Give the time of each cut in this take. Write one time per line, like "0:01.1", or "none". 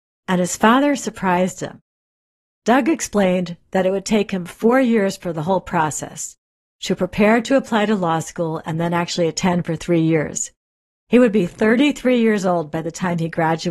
none